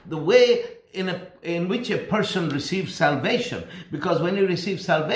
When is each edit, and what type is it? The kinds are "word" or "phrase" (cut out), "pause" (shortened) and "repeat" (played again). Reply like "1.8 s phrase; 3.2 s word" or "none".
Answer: none